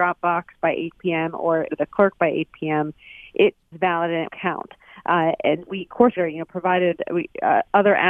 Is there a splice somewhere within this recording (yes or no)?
yes